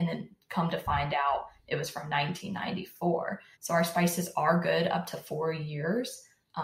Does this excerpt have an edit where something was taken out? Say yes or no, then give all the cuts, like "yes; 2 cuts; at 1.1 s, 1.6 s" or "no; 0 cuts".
yes; 1 cut; at 3.5 s